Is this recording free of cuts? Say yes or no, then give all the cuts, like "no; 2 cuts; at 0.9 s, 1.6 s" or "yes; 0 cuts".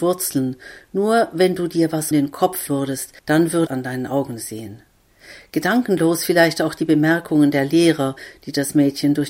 no; 4 cuts; at 2.1 s, 2.7 s, 3.2 s, 3.7 s